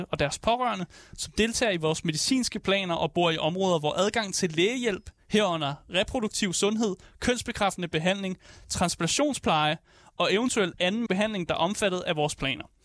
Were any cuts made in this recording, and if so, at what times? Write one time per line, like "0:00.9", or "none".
0:11.1

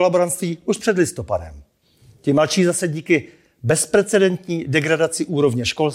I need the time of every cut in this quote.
none

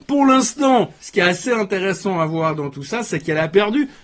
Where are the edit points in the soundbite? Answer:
none

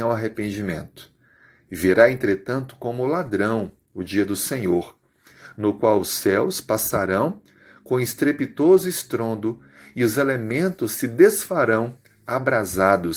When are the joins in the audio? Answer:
none

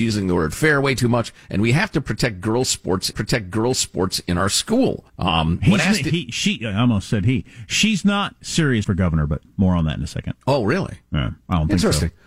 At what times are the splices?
0:03.1
0:05.1
0:08.8
0:10.4

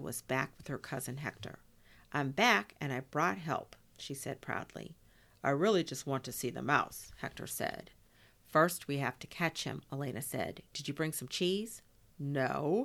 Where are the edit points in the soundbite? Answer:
none

